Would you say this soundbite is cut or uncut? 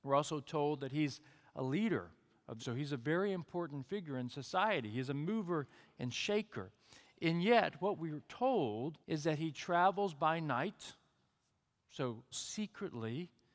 cut